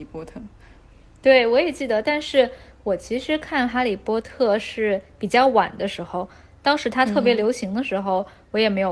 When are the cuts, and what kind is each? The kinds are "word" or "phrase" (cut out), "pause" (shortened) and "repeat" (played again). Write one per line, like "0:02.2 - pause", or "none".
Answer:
none